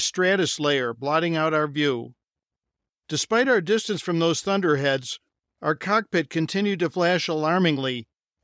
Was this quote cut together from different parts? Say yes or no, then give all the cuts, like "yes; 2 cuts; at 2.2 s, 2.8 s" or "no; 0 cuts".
no; 0 cuts